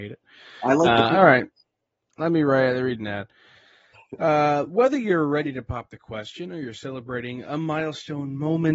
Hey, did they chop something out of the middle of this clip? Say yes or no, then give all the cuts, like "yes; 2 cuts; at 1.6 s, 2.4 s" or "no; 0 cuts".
no; 0 cuts